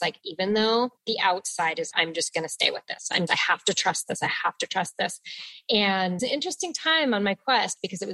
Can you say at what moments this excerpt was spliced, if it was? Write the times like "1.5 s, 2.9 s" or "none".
1.9 s, 3.3 s, 6.2 s